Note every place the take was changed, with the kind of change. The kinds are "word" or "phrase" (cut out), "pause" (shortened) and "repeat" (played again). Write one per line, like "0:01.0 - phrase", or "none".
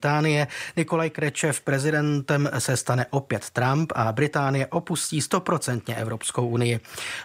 none